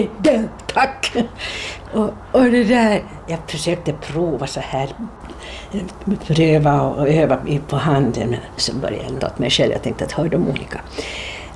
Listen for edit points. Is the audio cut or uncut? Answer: cut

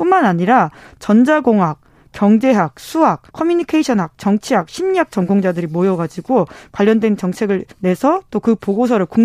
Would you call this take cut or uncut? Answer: cut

